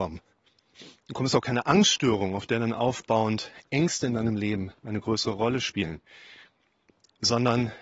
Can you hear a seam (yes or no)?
no